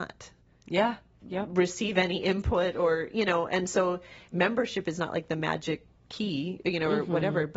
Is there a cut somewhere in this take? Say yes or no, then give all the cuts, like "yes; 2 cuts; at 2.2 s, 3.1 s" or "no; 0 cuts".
no; 0 cuts